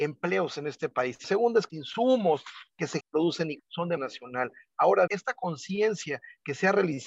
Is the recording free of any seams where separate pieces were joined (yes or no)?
no